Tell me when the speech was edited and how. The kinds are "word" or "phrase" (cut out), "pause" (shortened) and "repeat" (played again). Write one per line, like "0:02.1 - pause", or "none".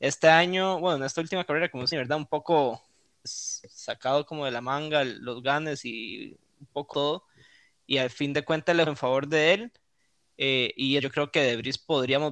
0:01.9 - word
0:03.2 - word
0:06.9 - word
0:08.9 - word
0:11.0 - word